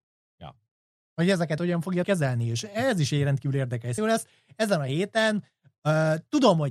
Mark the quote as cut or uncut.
cut